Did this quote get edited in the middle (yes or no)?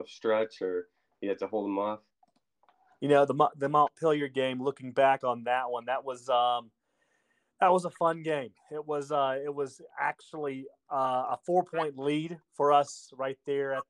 no